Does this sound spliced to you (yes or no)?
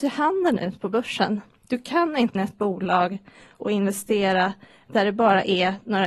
yes